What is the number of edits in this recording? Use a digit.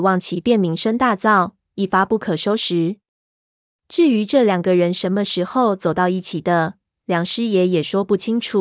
0